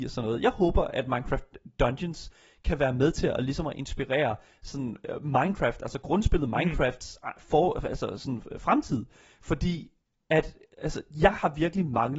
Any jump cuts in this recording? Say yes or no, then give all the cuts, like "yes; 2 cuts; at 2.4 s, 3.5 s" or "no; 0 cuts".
no; 0 cuts